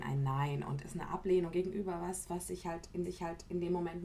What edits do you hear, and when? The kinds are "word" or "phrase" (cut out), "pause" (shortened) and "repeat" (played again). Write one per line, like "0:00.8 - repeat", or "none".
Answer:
0:03.0 - repeat